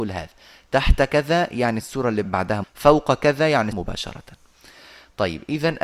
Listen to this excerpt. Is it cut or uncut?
cut